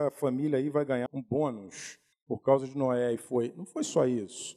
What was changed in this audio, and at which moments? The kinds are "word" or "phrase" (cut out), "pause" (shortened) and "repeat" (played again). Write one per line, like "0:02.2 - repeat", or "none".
0:01.1 - word